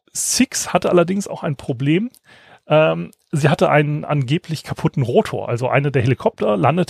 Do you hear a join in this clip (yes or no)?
no